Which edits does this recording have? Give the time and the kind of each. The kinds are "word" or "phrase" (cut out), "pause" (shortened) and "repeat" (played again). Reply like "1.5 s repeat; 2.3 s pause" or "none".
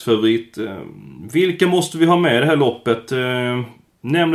none

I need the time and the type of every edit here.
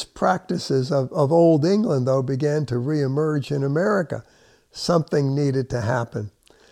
none

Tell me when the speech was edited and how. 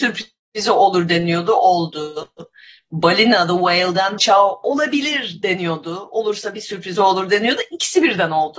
4.2 s word

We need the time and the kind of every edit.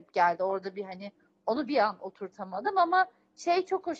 none

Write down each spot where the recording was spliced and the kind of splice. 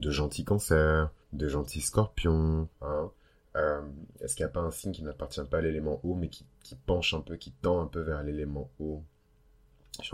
1.2 s pause; 2.7 s pause; 4.1 s pause

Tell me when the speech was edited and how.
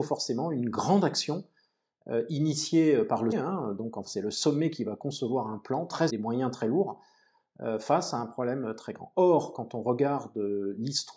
3.3 s word; 4.0 s phrase; 6.1 s phrase

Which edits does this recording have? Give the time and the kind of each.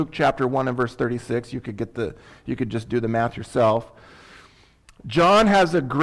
none

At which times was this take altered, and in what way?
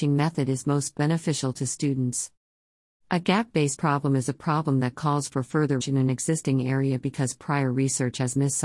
3.8 s word; 5.8 s word

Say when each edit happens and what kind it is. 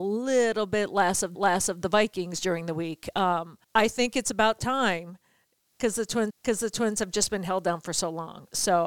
1.4 s repeat; 3.6 s pause; 6.3 s repeat

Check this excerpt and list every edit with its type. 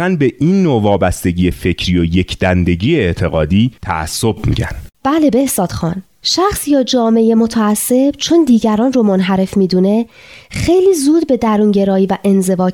3.8 s pause; 4.9 s pause

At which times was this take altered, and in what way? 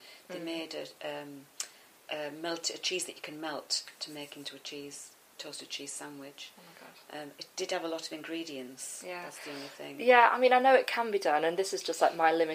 none

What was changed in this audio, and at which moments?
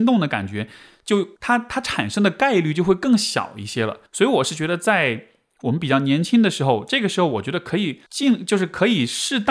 1.4 s pause; 4.1 s pause; 8.1 s pause

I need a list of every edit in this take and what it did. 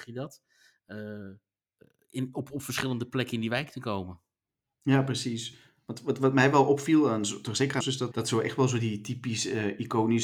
4.5 s pause; 7.8 s phrase; 8.1 s word

